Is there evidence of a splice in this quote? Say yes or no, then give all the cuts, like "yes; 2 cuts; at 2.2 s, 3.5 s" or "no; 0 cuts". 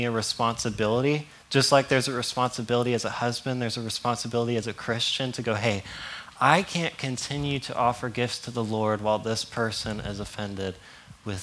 no; 0 cuts